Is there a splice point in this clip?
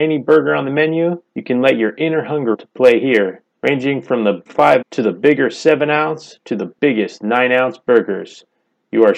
yes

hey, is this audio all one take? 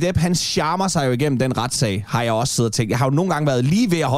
yes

